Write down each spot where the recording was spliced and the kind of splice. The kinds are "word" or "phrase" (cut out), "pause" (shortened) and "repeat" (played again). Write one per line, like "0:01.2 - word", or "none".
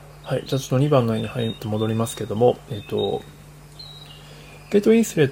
0:01.6 - phrase

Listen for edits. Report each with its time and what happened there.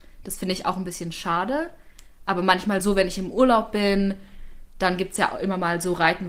none

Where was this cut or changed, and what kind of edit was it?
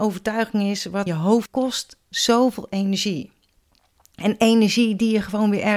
0:01.1 - word
0:01.5 - word

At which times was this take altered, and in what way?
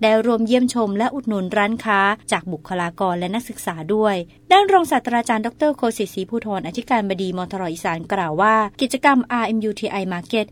0:02.2 - pause

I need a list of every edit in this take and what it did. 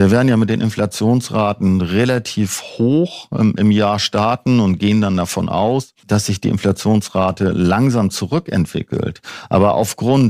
0:06.0 - pause

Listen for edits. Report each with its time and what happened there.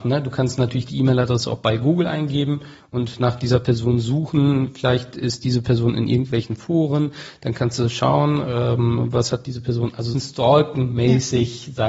0:10.1 - phrase

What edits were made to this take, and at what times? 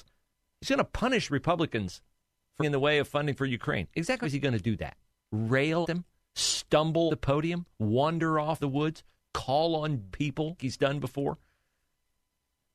0:02.6 - word
0:04.2 - word
0:05.8 - word
0:07.1 - word
0:08.6 - word
0:10.1 - word
0:10.6 - word

